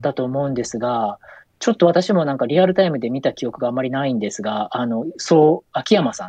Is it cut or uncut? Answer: uncut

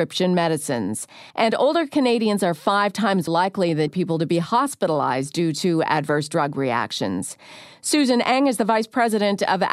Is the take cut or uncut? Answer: cut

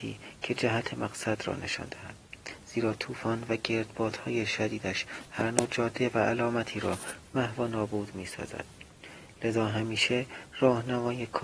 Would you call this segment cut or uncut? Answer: uncut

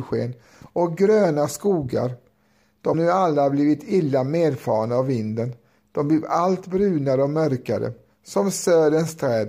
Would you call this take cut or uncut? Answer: cut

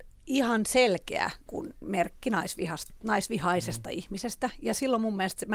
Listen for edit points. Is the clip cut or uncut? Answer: cut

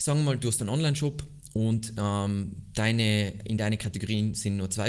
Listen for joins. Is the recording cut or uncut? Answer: uncut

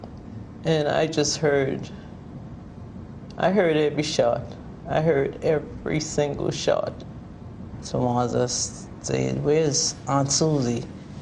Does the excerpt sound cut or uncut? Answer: uncut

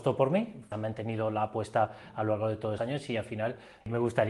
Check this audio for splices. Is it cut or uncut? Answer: cut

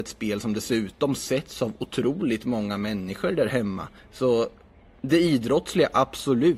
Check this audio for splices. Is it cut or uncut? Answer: cut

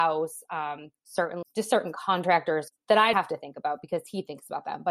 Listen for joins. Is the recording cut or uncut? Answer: cut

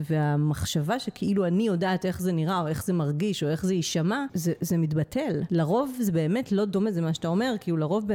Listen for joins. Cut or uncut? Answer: uncut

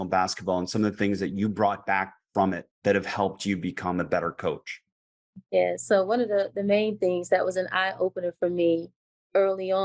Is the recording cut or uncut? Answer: cut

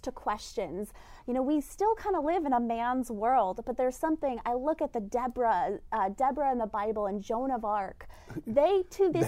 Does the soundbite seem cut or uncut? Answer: uncut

